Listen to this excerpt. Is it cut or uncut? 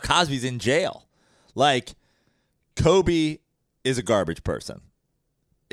uncut